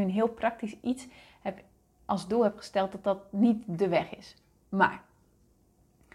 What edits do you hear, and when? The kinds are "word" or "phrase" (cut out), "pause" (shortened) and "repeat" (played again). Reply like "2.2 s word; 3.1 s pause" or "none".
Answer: none